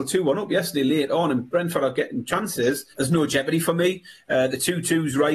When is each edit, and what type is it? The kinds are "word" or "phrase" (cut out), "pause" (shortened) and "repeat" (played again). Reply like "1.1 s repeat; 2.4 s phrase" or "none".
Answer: 2.9 s pause

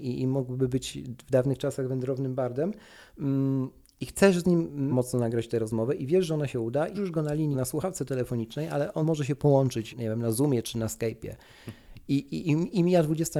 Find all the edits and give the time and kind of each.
4.9 s word; 6.9 s word; 7.5 s word; 9.0 s word; 9.9 s word; 10.6 s word

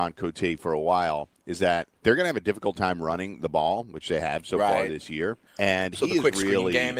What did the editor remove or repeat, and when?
2.0 s pause; 5.5 s pause

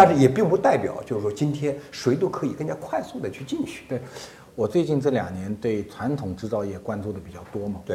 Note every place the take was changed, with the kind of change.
none

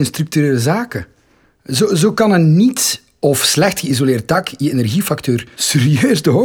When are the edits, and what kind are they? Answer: none

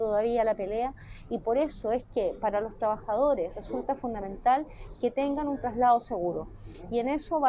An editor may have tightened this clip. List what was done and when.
none

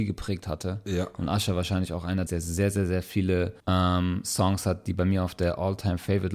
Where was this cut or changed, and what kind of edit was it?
2.3 s phrase; 3.6 s pause

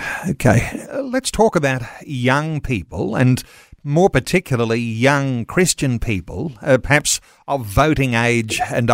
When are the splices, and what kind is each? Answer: none

